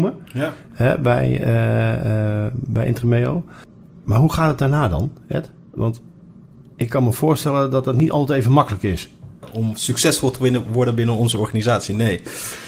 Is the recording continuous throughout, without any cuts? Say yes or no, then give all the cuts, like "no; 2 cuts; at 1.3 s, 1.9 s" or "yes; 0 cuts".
yes; 0 cuts